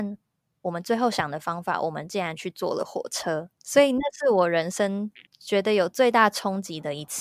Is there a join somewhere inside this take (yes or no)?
yes